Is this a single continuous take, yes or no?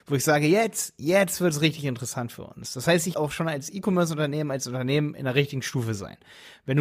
no